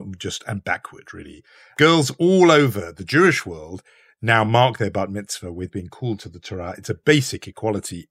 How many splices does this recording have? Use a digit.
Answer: 0